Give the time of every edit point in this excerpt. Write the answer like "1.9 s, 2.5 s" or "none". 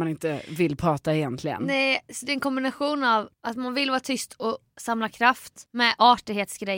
3.3 s, 5.7 s

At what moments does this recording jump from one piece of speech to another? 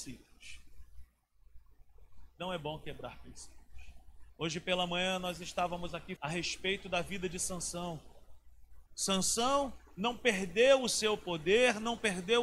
4.3 s, 6.2 s, 8.9 s

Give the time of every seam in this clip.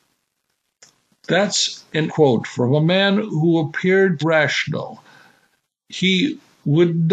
2.1 s, 4.2 s

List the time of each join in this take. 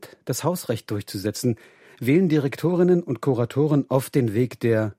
none

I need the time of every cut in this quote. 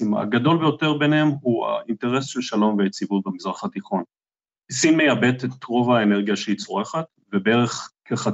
none

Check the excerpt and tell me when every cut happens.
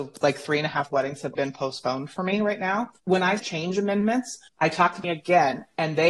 0.9 s, 1.4 s, 3.0 s, 3.4 s, 4.5 s, 5.0 s

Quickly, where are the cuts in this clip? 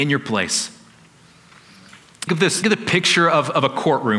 2.3 s, 2.6 s

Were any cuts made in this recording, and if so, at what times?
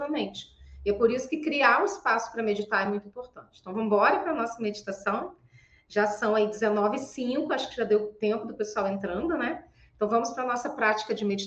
none

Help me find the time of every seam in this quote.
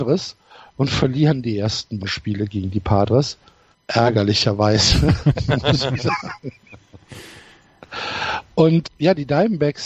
2.0 s, 3.7 s, 6.0 s, 8.8 s

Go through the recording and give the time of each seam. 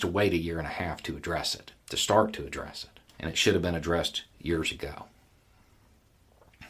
1.8 s, 3.1 s

